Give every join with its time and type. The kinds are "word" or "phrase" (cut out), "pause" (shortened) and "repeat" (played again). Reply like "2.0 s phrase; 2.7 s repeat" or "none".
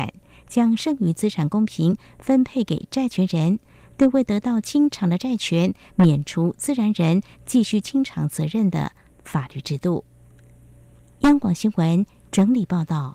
none

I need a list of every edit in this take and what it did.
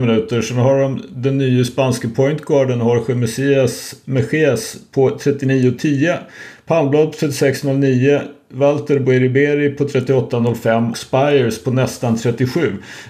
10.9 s word

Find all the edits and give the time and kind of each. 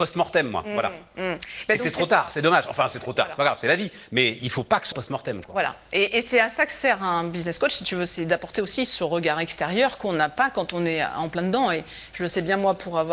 4.9 s word

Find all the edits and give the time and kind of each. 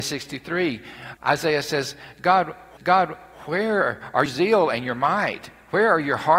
1.2 s word; 2.8 s repeat; 4.3 s word

